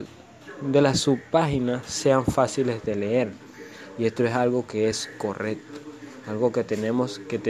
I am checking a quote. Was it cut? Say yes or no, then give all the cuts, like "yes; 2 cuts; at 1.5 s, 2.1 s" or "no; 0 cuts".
no; 0 cuts